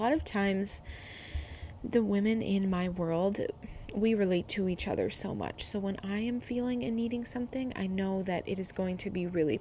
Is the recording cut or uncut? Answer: uncut